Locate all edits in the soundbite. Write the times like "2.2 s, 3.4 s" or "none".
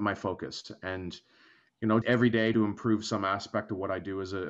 2.0 s, 2.5 s